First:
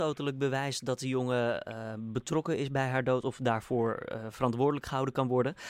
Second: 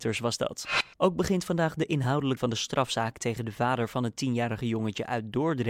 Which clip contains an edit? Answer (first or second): second